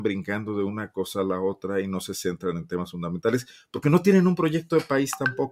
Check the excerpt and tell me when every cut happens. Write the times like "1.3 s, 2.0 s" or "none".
none